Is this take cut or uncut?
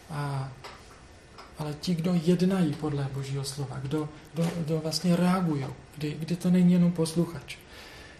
cut